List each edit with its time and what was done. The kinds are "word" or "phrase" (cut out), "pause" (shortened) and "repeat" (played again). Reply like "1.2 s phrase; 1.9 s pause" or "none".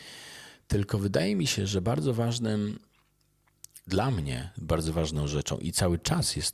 3.8 s pause